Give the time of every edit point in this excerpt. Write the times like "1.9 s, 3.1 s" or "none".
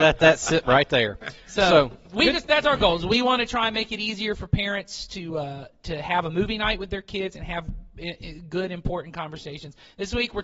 none